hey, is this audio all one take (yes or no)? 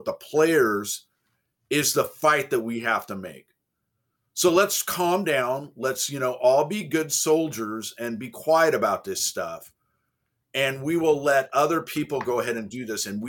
yes